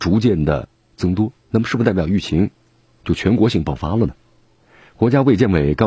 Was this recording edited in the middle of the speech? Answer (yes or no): yes